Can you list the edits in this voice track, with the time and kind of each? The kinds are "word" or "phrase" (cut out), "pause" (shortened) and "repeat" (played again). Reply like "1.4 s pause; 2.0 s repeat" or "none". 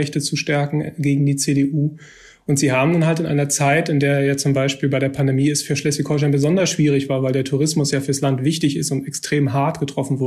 none